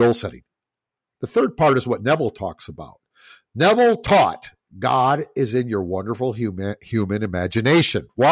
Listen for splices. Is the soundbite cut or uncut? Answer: uncut